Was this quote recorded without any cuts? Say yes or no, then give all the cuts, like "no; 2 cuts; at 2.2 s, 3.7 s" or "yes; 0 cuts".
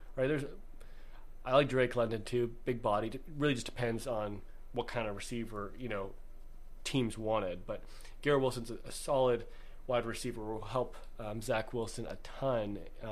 yes; 0 cuts